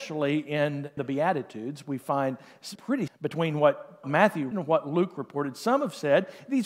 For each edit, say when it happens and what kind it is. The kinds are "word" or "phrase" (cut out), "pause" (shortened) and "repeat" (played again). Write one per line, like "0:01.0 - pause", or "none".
0:01.0 - word
0:02.8 - word
0:03.1 - phrase
0:04.0 - word
0:04.5 - word

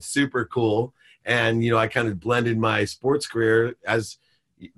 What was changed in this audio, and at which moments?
none

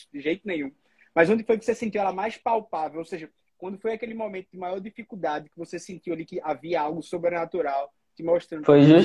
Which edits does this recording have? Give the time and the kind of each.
none

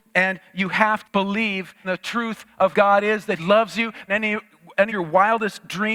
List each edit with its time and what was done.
0:01.0 - word
0:01.8 - word
0:02.7 - word
0:03.4 - word
0:04.1 - word
0:04.9 - word

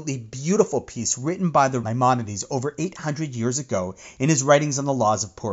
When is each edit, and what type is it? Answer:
0:01.8 - word

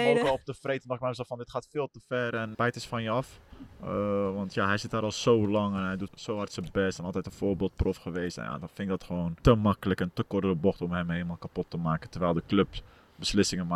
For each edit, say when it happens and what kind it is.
0:02.5 - word
0:06.1 - word
0:09.4 - pause

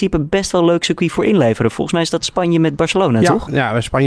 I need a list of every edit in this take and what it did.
none

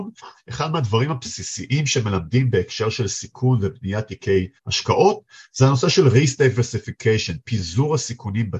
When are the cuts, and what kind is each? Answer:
0:04.6 - pause

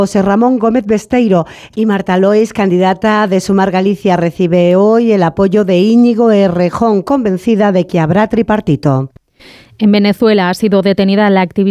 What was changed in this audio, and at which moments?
none

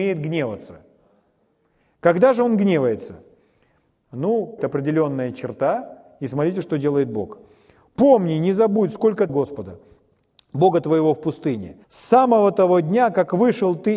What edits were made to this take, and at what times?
0:04.6 - word
0:09.3 - word
0:11.8 - pause

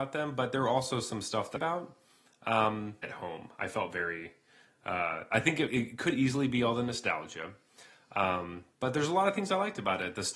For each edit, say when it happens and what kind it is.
0:01.6 - phrase
0:03.0 - phrase

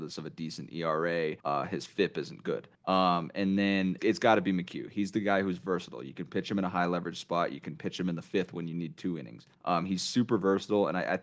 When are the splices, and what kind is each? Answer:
0:01.4 - pause
0:02.7 - pause
0:04.0 - word
0:09.5 - pause

